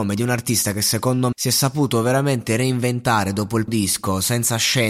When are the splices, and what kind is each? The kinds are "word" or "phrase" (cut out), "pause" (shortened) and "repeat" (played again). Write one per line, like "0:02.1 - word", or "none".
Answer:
0:01.3 - word
0:03.7 - word